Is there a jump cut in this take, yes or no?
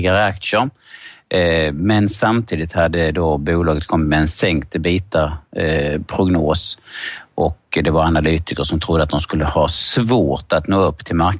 no